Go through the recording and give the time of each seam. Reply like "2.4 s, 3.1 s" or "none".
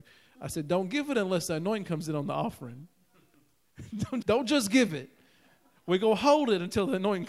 4.2 s

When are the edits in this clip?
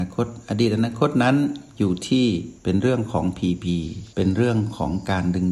2.6 s, 4.1 s

